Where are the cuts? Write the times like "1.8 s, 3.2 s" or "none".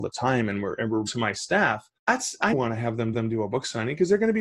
1.1 s, 2.0 s, 2.5 s, 3.1 s